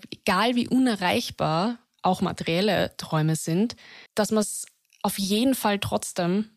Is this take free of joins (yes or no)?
no